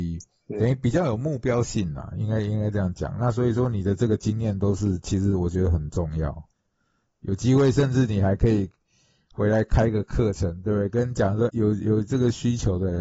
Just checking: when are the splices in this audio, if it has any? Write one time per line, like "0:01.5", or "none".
0:11.5